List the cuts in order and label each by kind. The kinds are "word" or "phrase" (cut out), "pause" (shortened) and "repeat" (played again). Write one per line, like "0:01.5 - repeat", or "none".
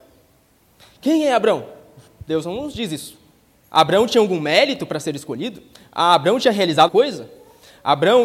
0:06.9 - word